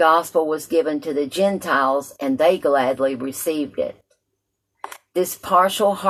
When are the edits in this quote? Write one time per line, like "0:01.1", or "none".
none

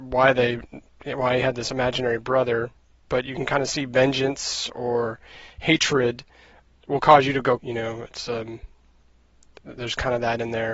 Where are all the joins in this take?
0:06.8
0:07.6

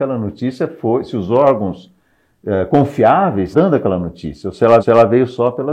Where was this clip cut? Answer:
0:03.5
0:04.8

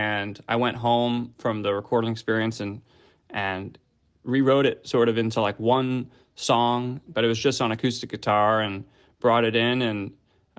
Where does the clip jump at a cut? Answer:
0:07.1

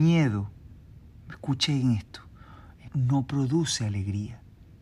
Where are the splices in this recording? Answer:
0:02.9

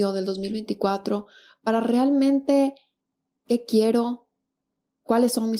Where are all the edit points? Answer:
0:03.4

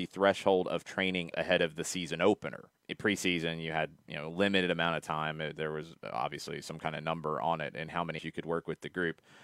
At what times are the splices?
0:01.3
0:02.8
0:08.2

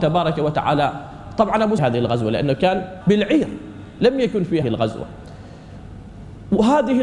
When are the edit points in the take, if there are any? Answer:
0:01.8
0:03.0
0:04.6

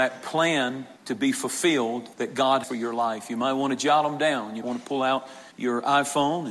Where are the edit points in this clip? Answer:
0:01.0
0:02.1
0:02.6
0:04.6
0:05.5

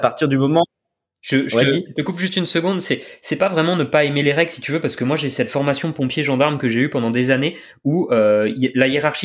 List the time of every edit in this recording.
none

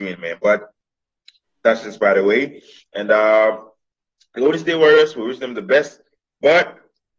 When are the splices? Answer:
none

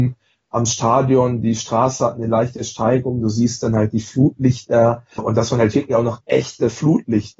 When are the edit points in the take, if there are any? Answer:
0:05.2

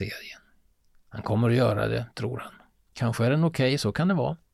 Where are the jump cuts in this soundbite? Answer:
none

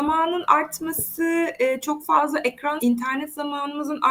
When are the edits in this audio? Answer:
0:02.8

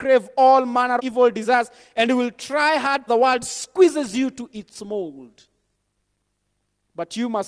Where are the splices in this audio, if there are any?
0:01.0
0:03.1

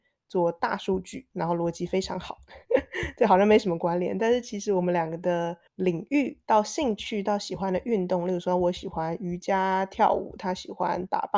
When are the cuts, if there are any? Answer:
0:01.3
0:05.7
0:06.4

